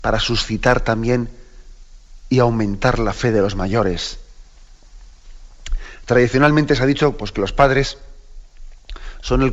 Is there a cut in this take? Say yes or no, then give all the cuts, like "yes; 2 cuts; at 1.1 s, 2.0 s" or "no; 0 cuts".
no; 0 cuts